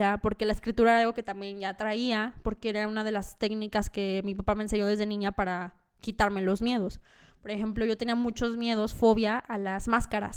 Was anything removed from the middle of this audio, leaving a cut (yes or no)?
no